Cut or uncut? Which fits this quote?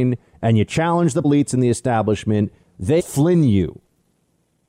cut